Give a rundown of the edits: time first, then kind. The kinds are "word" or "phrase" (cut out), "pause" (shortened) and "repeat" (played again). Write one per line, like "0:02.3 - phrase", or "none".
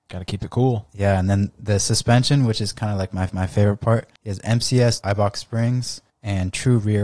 0:03.3 - repeat
0:04.2 - pause
0:05.0 - phrase
0:06.1 - pause